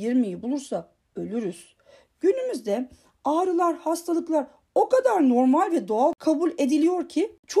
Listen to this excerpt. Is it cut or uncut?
uncut